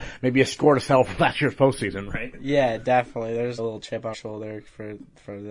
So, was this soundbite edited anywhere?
yes; 2 cuts; at 3.6 s, 4.1 s

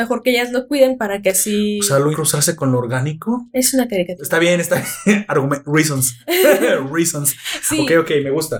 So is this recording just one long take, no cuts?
no; 1 cut; at 2.1 s

